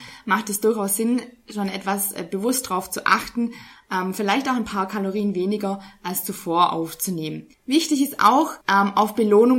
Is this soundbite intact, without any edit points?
no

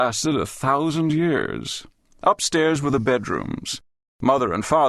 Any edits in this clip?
yes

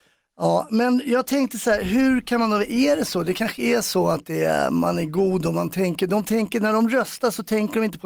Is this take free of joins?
yes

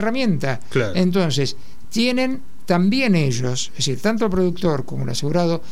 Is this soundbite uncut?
yes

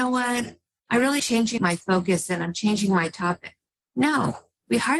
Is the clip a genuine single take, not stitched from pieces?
no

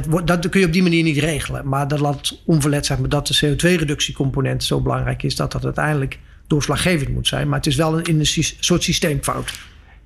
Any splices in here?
no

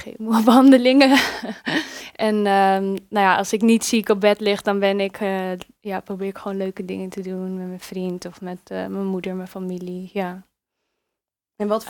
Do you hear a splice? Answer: no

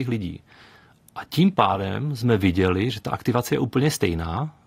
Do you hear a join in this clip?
no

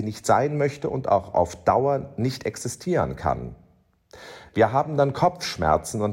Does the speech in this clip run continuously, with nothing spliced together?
yes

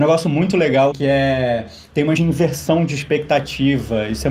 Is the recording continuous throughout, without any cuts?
no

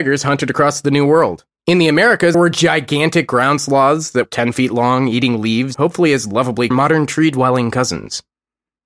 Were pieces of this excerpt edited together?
yes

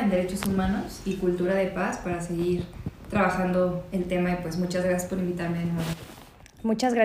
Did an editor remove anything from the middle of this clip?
no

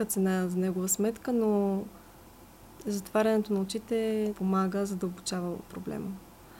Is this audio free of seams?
no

